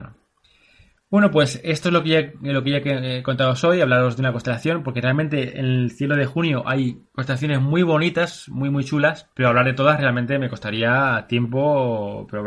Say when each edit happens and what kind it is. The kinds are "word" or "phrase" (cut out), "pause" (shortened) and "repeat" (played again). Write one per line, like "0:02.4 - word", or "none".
0:07.1 - pause
0:09.3 - pause